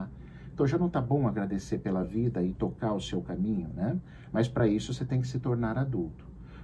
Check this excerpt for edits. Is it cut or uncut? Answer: uncut